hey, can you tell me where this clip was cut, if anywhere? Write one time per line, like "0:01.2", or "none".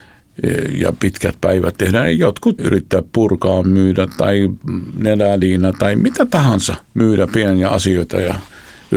0:02.6
0:06.8